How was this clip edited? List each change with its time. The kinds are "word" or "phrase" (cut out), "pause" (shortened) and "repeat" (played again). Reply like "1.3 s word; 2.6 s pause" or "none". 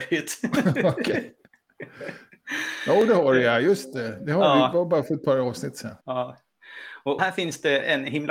6.0 s pause; 7.2 s word